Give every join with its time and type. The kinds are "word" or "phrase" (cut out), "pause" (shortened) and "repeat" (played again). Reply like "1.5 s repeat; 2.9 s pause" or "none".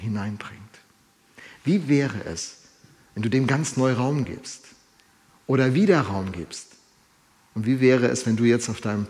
none